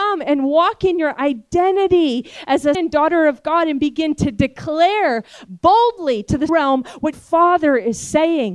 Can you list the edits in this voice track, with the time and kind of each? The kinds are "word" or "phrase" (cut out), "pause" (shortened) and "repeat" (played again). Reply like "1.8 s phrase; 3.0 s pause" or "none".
2.7 s word; 6.5 s word; 7.1 s word